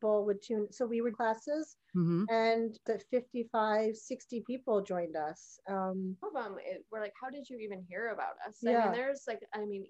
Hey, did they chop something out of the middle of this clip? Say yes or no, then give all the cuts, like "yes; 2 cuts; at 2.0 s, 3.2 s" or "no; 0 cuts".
yes; 4 cuts; at 1.1 s, 2.9 s, 6.2 s, 6.9 s